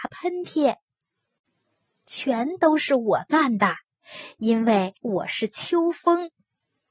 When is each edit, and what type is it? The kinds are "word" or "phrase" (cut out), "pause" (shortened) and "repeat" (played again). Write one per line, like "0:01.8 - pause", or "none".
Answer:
0:05.0 - pause